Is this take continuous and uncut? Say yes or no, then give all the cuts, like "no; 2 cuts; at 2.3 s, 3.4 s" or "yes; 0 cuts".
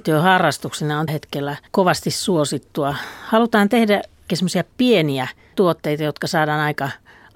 no; 4 cuts; at 1.1 s, 1.7 s, 4.3 s, 5.5 s